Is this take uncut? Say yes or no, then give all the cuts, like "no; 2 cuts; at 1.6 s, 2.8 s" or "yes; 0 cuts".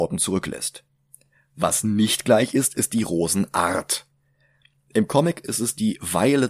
yes; 0 cuts